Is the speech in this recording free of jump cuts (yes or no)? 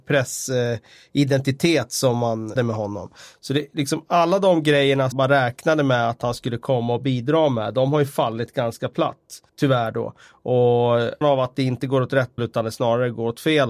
no